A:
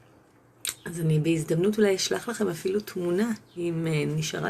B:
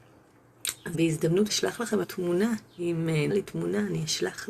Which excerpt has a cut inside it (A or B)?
B